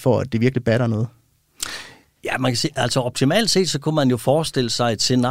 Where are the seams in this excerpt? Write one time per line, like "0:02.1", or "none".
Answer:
none